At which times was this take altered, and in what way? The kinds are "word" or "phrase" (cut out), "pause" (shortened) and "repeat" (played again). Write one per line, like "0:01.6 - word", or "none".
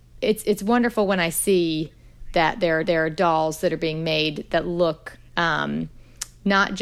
0:02.8 - repeat
0:05.3 - pause